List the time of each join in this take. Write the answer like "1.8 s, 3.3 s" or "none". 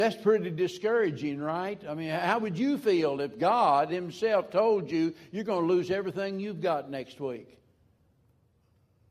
none

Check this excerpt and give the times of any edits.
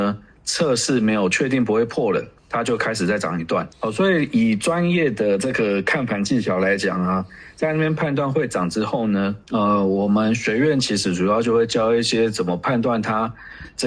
2.4 s, 3.7 s, 9.4 s

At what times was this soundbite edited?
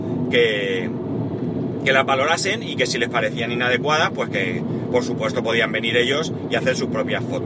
none

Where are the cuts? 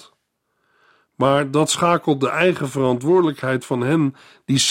none

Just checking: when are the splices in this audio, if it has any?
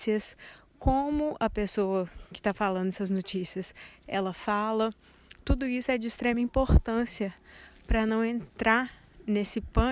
none

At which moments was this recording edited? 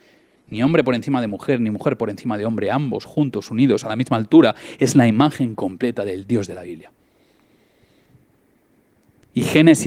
none

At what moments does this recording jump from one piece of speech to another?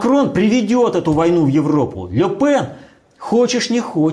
none

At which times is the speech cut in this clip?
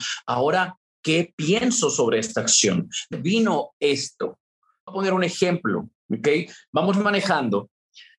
3.1 s, 4.9 s

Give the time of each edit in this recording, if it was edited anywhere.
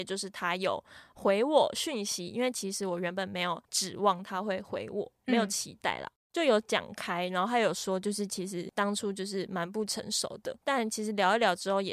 3.6 s, 10.6 s

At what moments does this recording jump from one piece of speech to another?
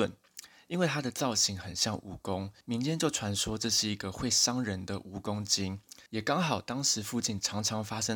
2.6 s, 6.1 s

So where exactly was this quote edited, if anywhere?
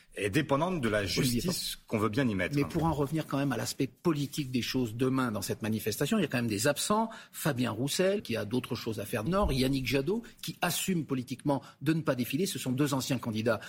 8.2 s, 9.3 s

